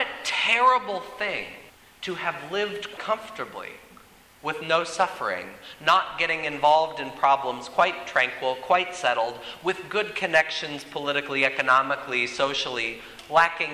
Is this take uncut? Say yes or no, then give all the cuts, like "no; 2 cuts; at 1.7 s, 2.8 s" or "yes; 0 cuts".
no; 2 cuts; at 1.7 s, 3.0 s